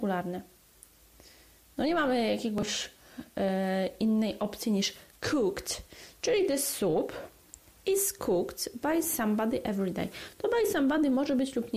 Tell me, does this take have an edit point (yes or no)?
no